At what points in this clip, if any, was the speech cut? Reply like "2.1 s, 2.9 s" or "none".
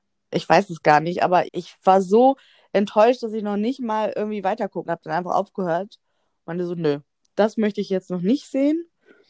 1.5 s, 4.8 s